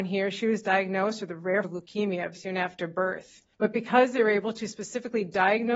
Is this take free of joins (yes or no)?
no